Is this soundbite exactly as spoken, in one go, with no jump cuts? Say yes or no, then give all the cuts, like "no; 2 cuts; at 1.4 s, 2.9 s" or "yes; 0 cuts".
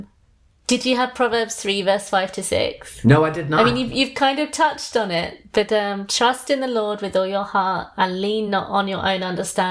yes; 0 cuts